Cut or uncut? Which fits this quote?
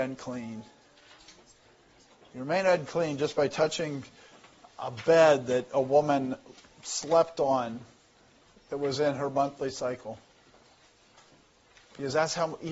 uncut